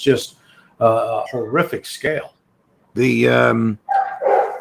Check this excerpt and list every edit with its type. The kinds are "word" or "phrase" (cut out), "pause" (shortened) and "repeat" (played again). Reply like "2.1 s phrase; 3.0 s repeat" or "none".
1.3 s word